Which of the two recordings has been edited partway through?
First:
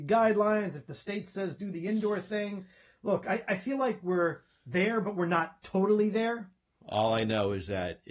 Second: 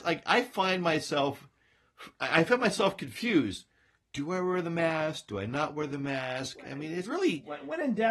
second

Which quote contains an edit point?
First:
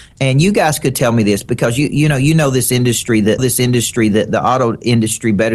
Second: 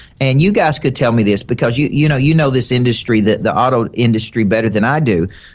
first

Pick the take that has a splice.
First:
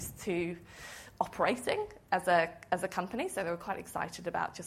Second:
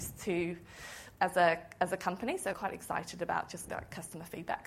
second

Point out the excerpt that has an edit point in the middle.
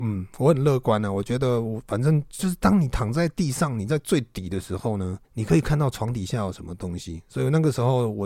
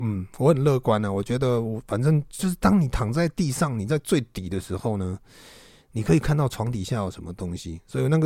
first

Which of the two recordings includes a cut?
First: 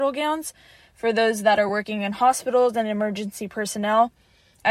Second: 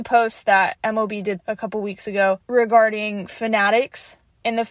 second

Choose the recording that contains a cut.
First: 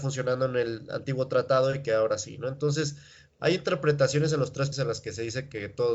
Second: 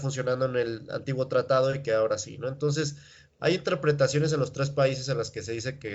first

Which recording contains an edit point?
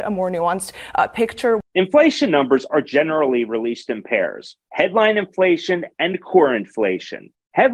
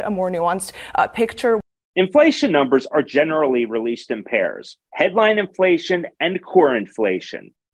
first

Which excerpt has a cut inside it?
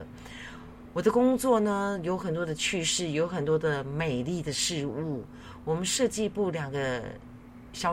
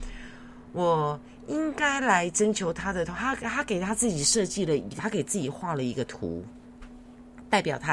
second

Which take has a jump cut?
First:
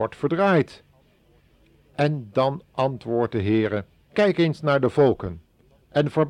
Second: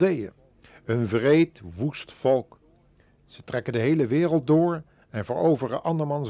first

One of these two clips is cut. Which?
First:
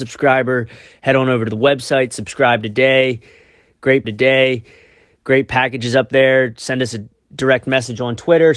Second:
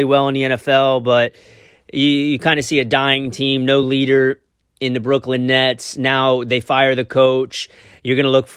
first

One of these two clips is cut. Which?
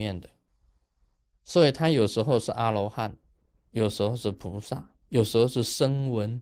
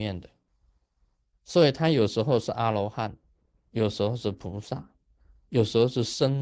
first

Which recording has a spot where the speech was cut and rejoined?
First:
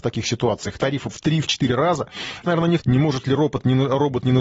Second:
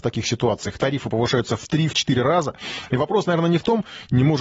first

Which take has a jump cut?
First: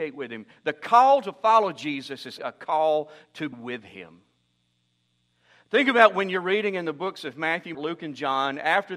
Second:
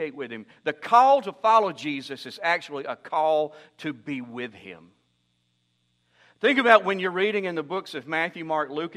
first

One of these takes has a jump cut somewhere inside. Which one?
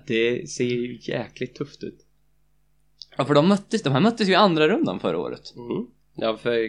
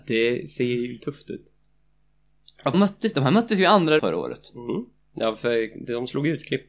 second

